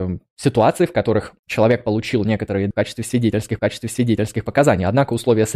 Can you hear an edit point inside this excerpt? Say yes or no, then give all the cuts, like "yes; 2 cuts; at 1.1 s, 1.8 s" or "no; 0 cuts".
yes; 3 cuts; at 1.4 s, 2.7 s, 3.6 s